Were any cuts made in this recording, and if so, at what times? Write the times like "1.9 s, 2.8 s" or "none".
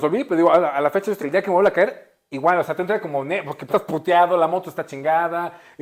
1.2 s, 3.7 s